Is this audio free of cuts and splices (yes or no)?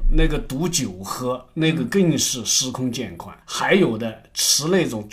no